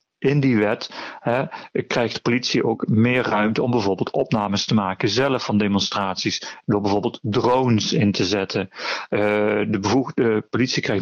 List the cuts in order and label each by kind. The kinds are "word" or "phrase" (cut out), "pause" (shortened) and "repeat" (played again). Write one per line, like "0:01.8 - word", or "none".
none